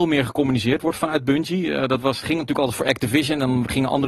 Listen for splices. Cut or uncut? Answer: uncut